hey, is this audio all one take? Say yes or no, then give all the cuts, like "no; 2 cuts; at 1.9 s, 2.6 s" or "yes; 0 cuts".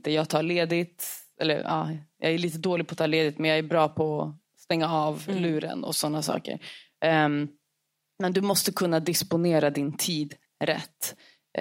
yes; 0 cuts